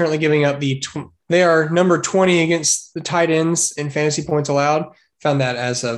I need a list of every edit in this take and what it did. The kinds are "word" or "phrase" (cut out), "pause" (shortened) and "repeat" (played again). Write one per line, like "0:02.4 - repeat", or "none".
0:01.2 - pause